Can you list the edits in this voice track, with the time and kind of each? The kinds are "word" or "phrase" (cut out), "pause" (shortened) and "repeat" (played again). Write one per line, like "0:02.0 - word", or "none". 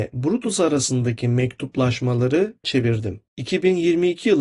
0:02.6 - word